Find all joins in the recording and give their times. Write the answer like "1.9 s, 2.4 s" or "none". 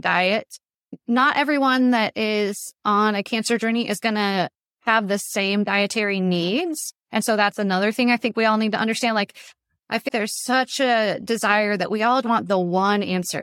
10.1 s, 12.2 s